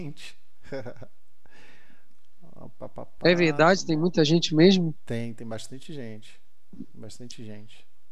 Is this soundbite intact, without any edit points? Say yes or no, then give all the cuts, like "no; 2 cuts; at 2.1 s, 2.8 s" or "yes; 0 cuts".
yes; 0 cuts